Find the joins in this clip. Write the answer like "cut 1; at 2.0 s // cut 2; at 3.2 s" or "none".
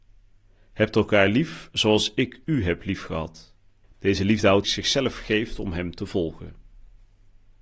cut 1; at 3.8 s // cut 2; at 4.6 s